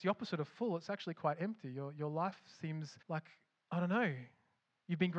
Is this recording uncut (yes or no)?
no